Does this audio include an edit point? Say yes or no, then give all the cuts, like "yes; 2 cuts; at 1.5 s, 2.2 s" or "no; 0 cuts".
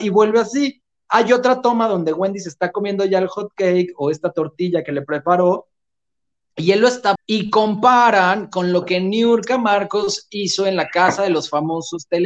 yes; 1 cut; at 7.2 s